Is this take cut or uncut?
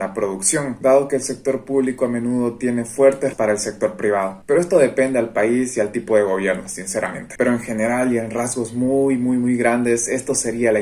cut